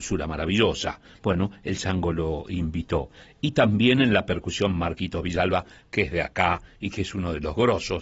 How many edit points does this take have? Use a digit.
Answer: 0